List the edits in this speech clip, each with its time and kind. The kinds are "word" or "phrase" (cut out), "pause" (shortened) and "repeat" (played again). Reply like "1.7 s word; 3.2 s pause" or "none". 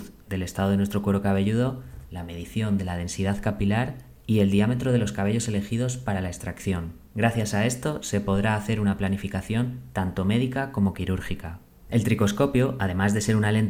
none